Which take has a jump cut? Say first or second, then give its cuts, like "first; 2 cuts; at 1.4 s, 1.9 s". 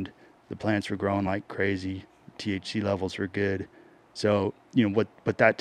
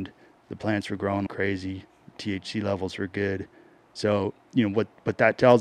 second; 1 cut; at 1.3 s